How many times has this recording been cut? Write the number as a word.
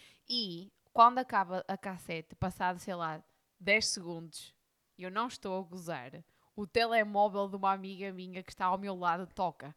zero